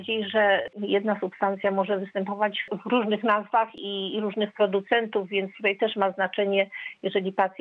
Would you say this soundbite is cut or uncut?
uncut